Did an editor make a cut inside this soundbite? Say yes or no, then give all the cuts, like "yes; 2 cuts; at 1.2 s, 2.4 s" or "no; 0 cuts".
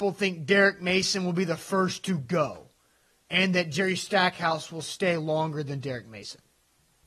no; 0 cuts